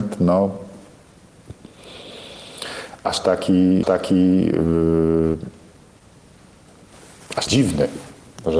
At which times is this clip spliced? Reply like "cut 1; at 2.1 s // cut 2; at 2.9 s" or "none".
cut 1; at 3.8 s // cut 2; at 7.5 s